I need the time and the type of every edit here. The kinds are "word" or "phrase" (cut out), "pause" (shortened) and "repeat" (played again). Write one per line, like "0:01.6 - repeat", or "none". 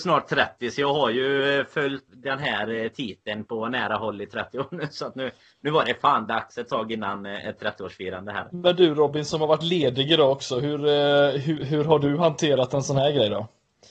0:02.1 - word
0:11.6 - word